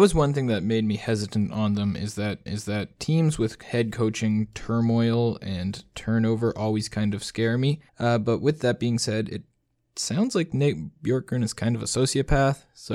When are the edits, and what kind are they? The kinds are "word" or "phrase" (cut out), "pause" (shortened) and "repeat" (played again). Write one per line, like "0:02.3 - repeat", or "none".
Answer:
0:02.5 - repeat
0:07.9 - pause